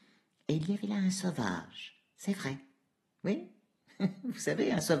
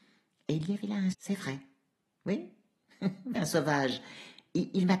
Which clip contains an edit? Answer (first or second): second